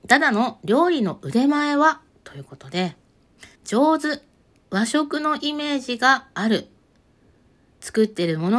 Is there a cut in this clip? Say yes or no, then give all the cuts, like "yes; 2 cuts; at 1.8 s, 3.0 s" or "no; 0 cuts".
yes; 2 cuts; at 2.1 s, 3.5 s